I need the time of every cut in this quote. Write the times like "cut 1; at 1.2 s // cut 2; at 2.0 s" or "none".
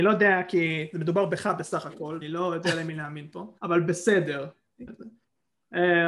cut 1; at 2.2 s // cut 2; at 3.6 s // cut 3; at 4.9 s